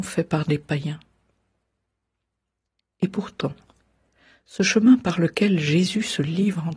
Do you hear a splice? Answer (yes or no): no